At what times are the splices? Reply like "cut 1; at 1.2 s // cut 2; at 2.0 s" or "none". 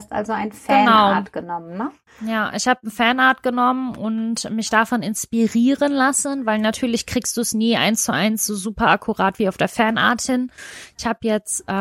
none

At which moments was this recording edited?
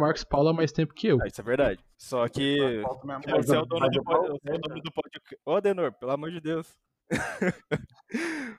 cut 1; at 1.9 s // cut 2; at 3.2 s // cut 3; at 5.4 s

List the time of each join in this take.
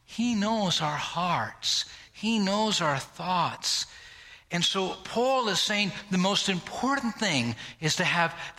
none

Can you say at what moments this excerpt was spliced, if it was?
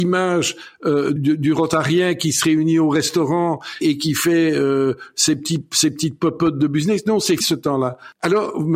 cut 1; at 1.2 s // cut 2; at 3.8 s // cut 3; at 7.4 s

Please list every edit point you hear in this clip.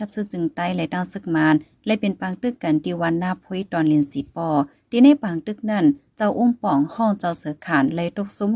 none

